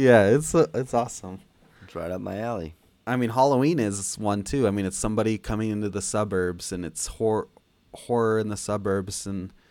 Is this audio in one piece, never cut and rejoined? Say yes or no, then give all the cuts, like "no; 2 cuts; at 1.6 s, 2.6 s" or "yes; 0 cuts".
yes; 0 cuts